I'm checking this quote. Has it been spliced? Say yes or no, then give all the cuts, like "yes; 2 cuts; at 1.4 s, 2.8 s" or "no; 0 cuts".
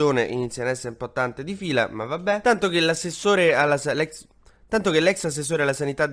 no; 0 cuts